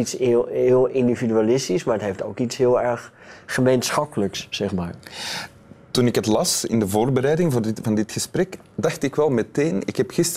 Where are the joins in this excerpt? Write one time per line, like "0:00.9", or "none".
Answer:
none